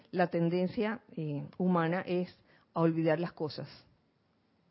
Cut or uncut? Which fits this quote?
uncut